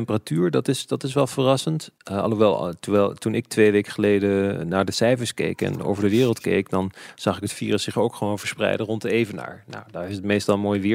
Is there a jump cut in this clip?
no; 0 cuts

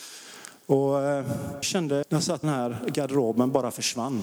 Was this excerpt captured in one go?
no; 3 cuts; at 1.6 s, 2.0 s, 2.4 s

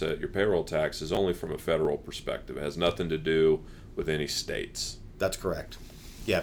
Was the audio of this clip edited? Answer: no; 0 cuts

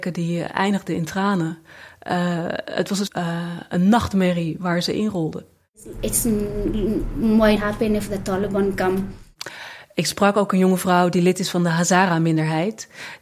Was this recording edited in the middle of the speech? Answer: yes; 2 cuts; at 3.1 s, 7.6 s

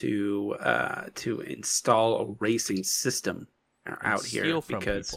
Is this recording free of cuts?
yes; 0 cuts

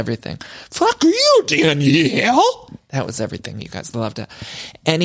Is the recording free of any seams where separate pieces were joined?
yes; 0 cuts

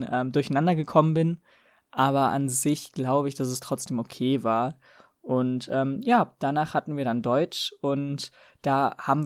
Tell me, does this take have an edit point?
no; 0 cuts

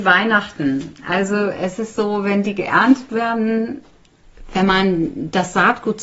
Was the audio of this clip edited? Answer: no; 0 cuts

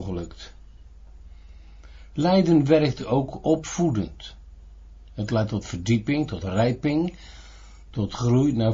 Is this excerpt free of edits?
yes; 0 cuts

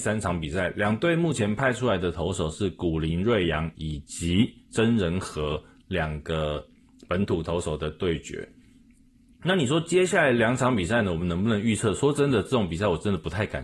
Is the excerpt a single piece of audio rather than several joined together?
yes; 0 cuts

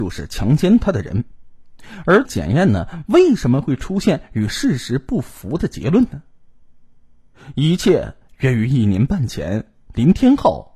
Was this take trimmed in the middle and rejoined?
yes; 1 cut; at 2.2 s

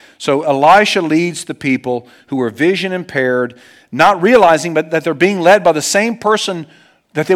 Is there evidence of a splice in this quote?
no; 0 cuts

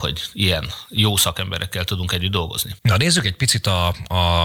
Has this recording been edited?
yes; 1 cut; at 2.8 s

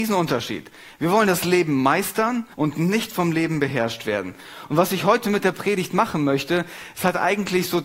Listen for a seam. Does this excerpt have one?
yes; 1 cut; at 2.5 s

